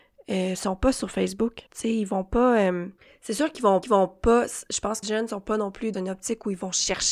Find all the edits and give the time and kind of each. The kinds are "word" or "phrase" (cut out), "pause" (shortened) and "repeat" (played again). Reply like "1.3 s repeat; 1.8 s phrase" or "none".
1.7 s pause; 3.0 s pause; 3.8 s repeat; 5.0 s phrase; 5.9 s word